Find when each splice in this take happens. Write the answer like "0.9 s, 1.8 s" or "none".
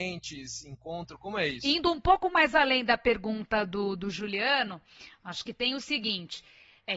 none